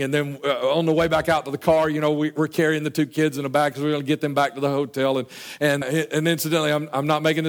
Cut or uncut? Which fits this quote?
cut